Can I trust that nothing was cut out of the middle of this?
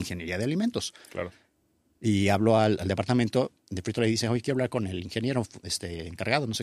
yes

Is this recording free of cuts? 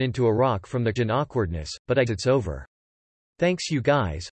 no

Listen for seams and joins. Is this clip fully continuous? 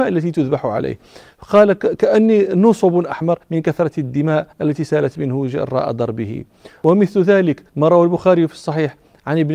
no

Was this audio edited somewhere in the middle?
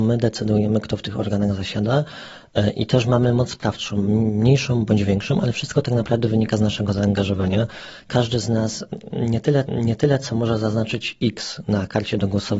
yes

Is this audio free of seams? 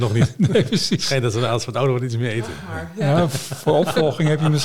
yes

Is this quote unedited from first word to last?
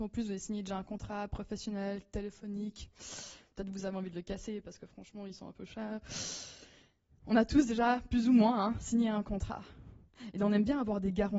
yes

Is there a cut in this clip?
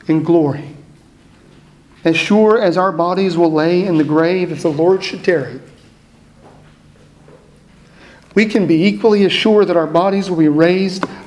no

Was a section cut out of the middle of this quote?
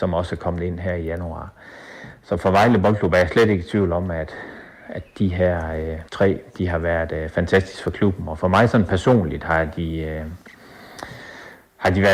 yes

